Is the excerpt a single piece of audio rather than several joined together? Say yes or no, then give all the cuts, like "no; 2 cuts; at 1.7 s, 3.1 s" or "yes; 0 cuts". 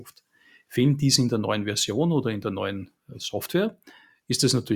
yes; 0 cuts